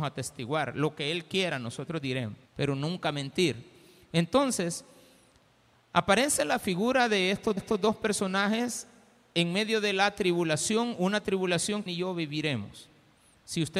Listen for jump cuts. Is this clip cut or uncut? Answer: cut